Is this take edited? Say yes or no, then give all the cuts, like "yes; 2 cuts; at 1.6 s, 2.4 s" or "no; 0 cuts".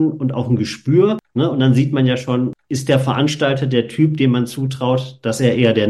no; 0 cuts